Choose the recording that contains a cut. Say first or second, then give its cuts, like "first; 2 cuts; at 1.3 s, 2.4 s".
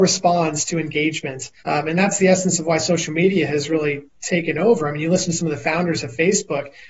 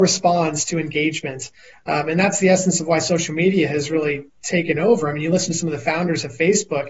first; 1 cut; at 1.6 s